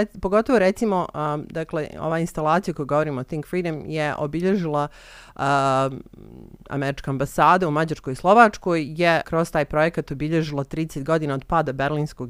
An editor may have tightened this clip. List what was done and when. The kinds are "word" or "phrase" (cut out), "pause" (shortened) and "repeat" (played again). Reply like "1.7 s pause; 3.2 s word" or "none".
9.2 s word